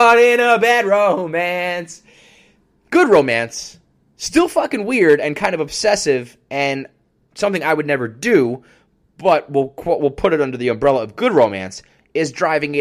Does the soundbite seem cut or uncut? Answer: uncut